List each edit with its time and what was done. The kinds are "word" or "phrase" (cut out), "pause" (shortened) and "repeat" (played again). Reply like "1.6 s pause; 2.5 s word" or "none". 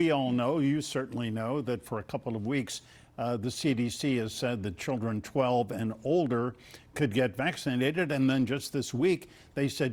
none